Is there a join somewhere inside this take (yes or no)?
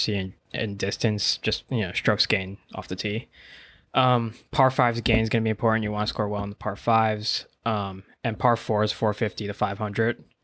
no